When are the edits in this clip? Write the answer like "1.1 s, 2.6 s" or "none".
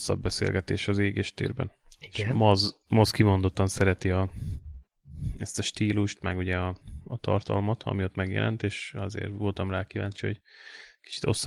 none